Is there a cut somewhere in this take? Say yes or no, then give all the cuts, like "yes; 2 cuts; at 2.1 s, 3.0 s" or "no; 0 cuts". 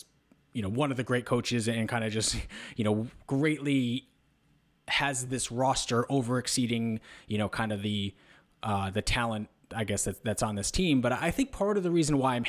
no; 0 cuts